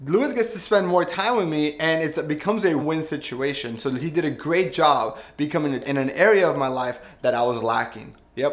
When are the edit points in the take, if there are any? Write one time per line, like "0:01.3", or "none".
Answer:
0:02.8
0:05.8